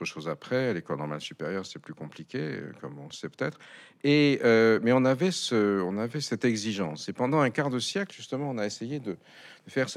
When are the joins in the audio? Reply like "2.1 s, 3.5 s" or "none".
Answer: none